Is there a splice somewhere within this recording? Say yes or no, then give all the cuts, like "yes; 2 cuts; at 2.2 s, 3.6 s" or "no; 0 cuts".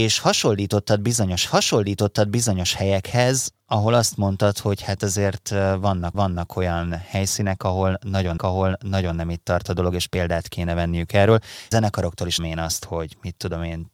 yes; 5 cuts; at 1.5 s, 6.1 s, 8.4 s, 11.7 s, 12.4 s